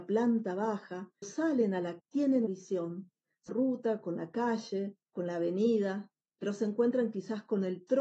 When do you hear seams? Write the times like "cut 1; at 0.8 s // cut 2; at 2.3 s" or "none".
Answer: cut 1; at 1.2 s // cut 2; at 2.0 s // cut 3; at 2.5 s // cut 4; at 3.5 s // cut 5; at 5.0 s // cut 6; at 6.2 s